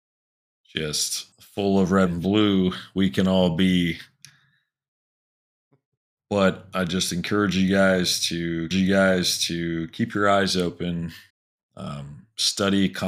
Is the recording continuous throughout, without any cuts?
no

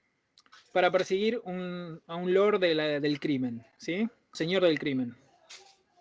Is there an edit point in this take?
yes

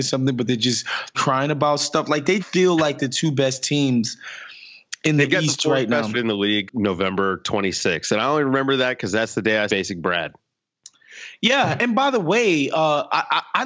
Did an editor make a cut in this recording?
yes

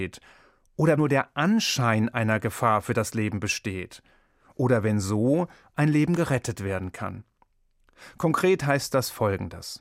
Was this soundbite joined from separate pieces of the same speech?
yes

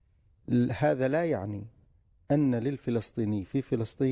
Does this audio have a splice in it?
no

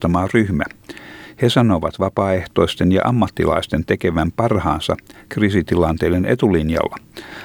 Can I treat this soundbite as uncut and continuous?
yes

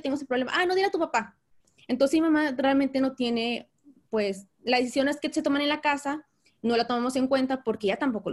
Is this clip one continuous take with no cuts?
yes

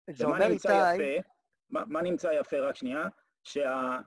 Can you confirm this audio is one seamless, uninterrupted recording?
yes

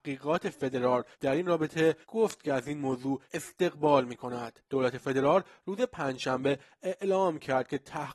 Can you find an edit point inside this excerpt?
yes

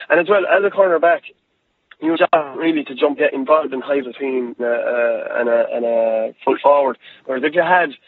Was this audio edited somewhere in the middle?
yes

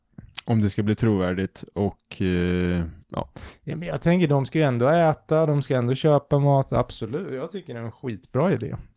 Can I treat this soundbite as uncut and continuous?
no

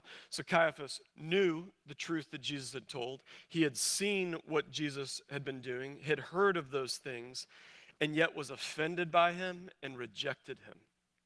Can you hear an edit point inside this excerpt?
yes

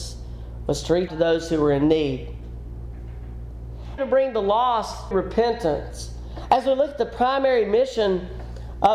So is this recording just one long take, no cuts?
no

